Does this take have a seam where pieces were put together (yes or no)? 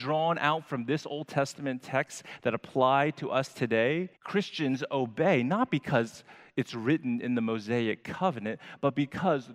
yes